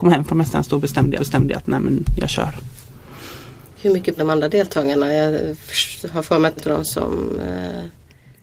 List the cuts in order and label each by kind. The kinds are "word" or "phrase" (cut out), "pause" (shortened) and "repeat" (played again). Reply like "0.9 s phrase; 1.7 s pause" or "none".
1.2 s repeat; 4.2 s word; 6.6 s phrase